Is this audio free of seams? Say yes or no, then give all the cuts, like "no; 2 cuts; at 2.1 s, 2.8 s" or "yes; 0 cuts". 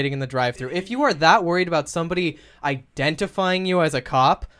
yes; 0 cuts